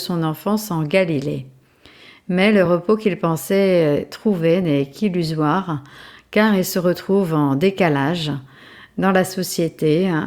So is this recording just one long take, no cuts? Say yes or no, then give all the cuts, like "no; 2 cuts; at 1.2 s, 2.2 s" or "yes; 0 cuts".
yes; 0 cuts